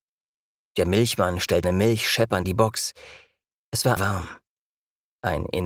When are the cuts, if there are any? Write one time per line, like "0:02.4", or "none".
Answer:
0:01.6
0:02.4
0:04.0